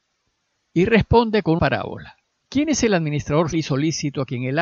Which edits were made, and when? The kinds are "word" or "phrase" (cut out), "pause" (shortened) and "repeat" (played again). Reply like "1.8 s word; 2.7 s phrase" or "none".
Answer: 1.6 s word; 2.2 s pause; 3.5 s word